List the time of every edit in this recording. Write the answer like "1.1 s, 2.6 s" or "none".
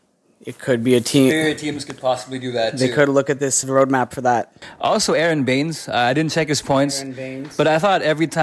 3.6 s